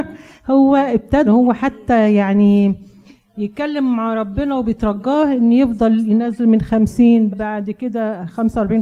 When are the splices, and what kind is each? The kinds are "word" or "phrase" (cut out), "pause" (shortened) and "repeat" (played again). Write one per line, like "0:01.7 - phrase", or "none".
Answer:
0:01.3 - word
0:07.3 - word